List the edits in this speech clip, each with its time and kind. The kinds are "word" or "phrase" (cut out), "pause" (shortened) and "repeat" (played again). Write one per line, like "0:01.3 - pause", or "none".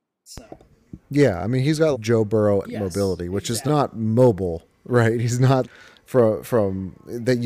0:01.0 - pause
0:01.9 - word
0:02.6 - word
0:03.7 - phrase
0:05.6 - word

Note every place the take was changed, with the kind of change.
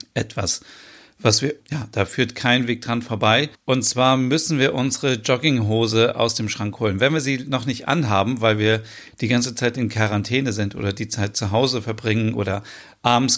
0:01.6 - word
0:03.5 - pause

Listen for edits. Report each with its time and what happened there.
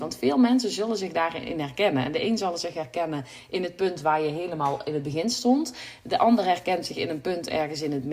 none

